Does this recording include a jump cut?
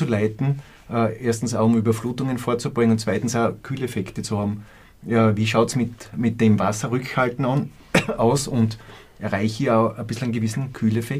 no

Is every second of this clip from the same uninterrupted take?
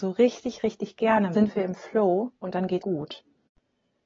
no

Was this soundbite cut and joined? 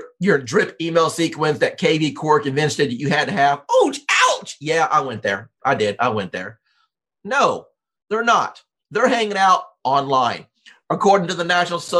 no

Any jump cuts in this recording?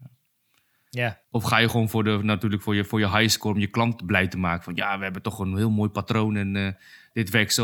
yes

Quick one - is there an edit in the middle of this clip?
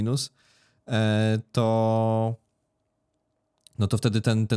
no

